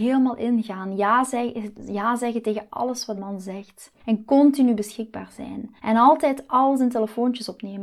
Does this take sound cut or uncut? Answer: cut